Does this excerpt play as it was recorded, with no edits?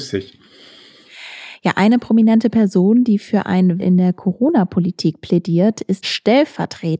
no; 2 cuts; at 3.8 s, 6.0 s

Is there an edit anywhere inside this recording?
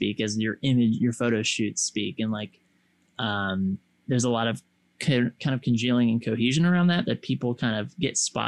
no; 0 cuts

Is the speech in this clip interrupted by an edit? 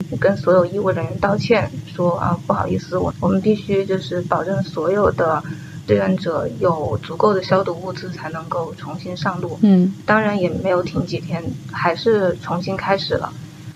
yes; 1 cut; at 10.1 s

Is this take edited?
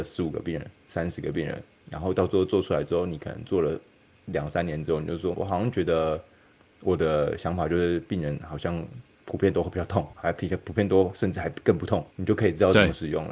yes; 2 cuts; at 5.3 s, 10.1 s

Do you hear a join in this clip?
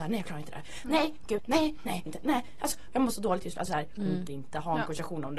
yes; 5 cuts; at 1.4 s, 2.1 s, 2.9 s, 3.7 s, 4.3 s

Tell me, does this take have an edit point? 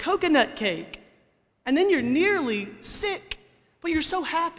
no; 0 cuts

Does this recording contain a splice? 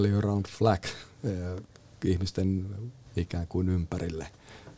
yes; 1 cut; at 3.1 s

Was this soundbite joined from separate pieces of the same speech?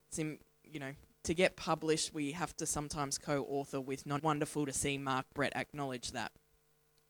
yes; 1 cut; at 4.2 s

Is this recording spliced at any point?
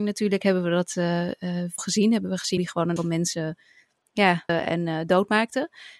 yes; 4 cuts; at 1.8 s, 2.6 s, 3.0 s, 4.5 s

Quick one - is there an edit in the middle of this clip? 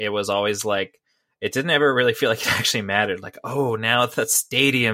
no; 0 cuts

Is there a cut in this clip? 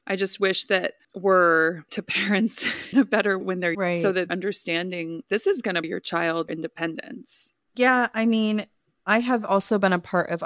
yes; 9 cuts; at 1.0 s, 1.9 s, 2.9 s, 3.4 s, 3.7 s, 4.3 s, 5.3 s, 5.8 s, 6.5 s

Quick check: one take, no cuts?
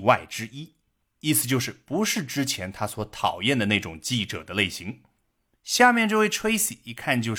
yes; 0 cuts

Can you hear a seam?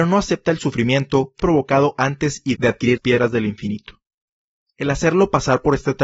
yes; 3 cuts; at 1.4 s, 2.5 s, 3.0 s

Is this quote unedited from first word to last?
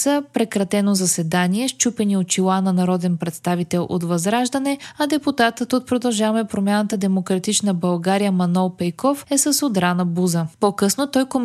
yes; 0 cuts

